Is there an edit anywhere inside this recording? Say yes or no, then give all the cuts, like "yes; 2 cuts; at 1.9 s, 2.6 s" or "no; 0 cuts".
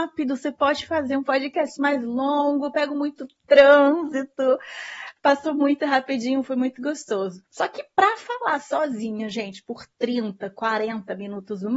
yes; 1 cut; at 7.5 s